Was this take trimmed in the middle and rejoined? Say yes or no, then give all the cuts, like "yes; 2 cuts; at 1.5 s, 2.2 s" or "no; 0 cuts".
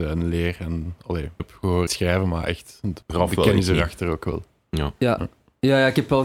yes; 3 cuts; at 1.4 s, 1.9 s, 3.0 s